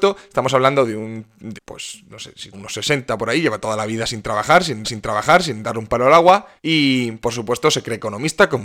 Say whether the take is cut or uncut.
cut